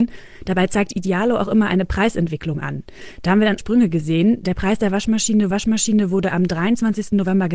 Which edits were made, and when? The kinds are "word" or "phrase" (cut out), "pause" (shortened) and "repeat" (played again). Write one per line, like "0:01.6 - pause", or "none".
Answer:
0:03.6 - word
0:05.5 - repeat